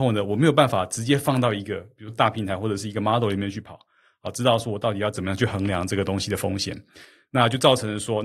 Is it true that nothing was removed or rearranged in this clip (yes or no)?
yes